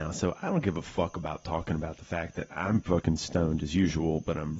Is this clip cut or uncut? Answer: cut